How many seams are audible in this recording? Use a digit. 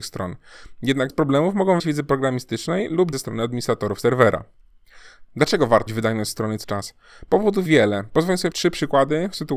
7